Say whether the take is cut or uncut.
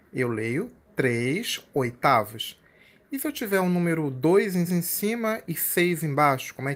cut